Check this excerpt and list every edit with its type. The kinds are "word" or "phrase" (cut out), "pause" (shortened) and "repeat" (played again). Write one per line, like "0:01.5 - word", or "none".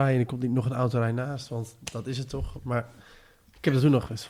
none

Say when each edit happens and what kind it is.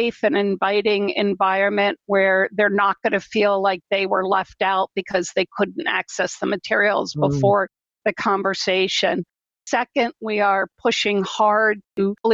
none

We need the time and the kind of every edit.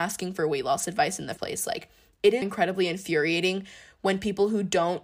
0:01.4 - word
0:02.4 - word

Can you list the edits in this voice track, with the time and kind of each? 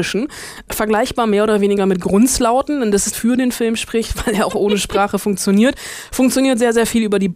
0:03.1 - phrase

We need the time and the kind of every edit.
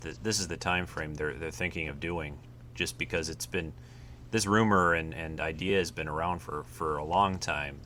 none

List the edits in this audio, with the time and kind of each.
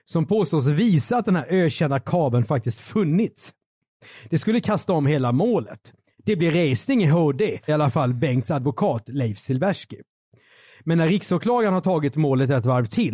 0:07.7 - word

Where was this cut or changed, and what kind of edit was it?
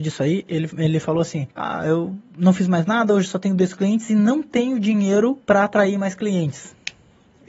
0:01.5 - pause

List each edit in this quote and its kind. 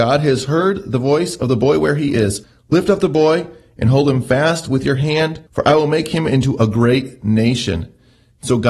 0:05.5 - pause

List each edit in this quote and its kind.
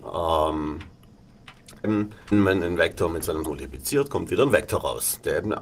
0:01.8 - word
0:02.3 - word
0:03.4 - word

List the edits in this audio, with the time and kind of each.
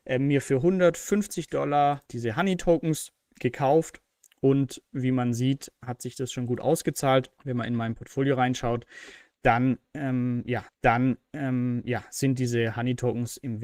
0:02.1 - word
0:07.4 - pause
0:10.7 - repeat

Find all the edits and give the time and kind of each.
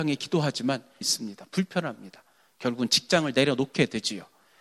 0:01.0 - phrase

